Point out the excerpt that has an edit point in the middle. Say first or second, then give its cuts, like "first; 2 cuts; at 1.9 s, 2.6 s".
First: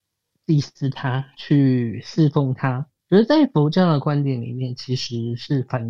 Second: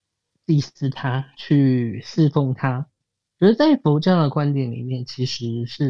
first; 1 cut; at 3.0 s